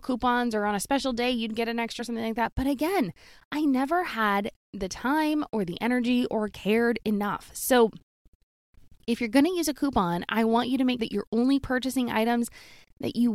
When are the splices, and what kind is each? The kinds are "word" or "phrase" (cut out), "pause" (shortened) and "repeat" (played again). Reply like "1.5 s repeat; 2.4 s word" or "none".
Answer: 2.0 s word; 11.0 s word

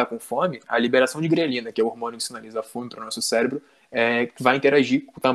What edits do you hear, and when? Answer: none

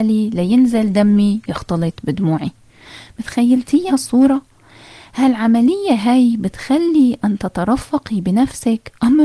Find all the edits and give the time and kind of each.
3.9 s word

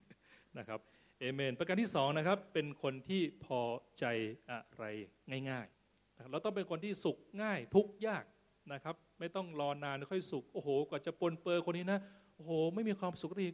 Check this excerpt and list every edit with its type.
5.7 s pause

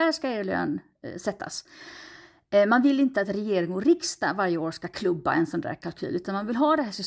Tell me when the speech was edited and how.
none

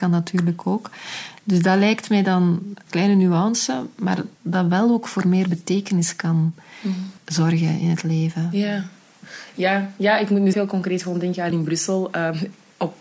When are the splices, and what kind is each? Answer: 2.9 s word; 4.3 s pause; 7.2 s pause; 10.5 s word; 11.5 s phrase

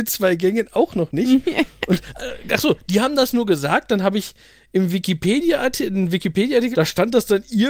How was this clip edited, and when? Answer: 6.7 s word

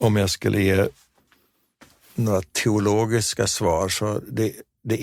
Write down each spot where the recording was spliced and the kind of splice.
none

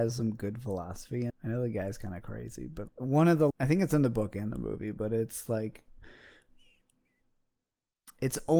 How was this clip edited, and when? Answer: 1.3 s word; 2.9 s word; 3.5 s word

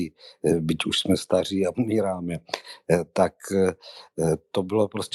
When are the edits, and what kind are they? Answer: 1.7 s word

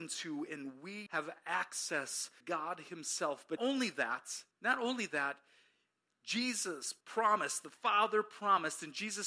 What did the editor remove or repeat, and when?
1.1 s word; 2.4 s word; 3.6 s word; 4.5 s pause; 7.0 s pause

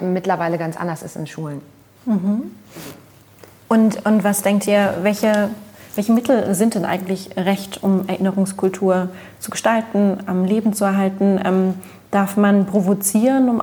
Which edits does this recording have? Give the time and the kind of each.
none

